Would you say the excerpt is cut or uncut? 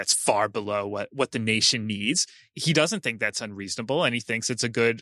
uncut